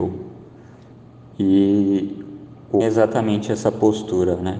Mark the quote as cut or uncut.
cut